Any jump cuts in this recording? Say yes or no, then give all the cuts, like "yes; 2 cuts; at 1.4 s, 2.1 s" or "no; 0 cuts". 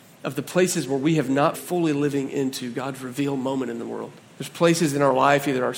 yes; 2 cuts; at 1.5 s, 4.2 s